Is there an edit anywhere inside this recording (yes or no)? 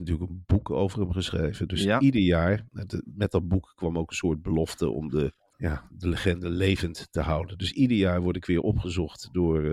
yes